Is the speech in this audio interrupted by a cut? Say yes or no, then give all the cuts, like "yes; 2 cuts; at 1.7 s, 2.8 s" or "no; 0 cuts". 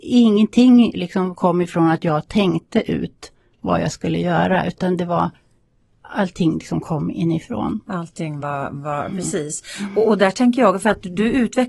no; 0 cuts